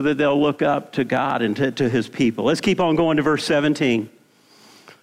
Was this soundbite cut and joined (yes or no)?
no